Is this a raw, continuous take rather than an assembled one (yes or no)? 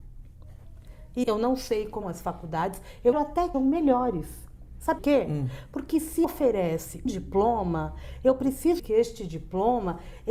no